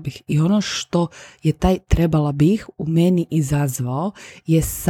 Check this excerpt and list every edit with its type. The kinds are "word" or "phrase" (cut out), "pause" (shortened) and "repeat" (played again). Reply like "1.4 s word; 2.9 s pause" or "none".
none

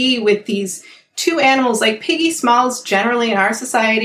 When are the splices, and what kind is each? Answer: none

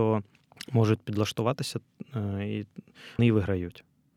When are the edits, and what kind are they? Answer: 3.2 s word

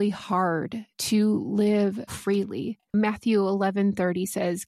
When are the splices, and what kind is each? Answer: 0.9 s pause; 2.1 s word

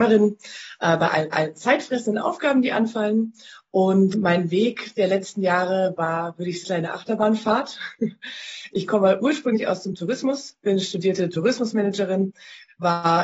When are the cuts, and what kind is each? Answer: 1.3 s repeat; 4.1 s word; 6.6 s phrase

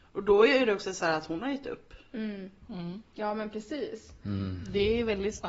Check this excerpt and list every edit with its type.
none

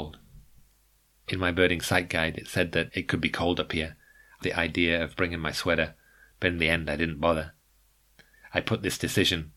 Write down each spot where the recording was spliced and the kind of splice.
4.4 s phrase

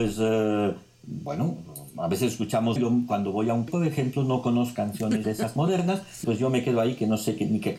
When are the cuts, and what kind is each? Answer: 2.8 s word; 3.7 s word; 4.7 s word; 5.2 s word; 5.6 s word; 6.2 s word

